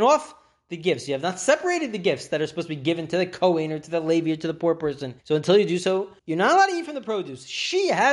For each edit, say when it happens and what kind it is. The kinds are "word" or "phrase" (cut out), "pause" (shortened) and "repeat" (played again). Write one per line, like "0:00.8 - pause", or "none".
0:05.2 - pause
0:06.2 - pause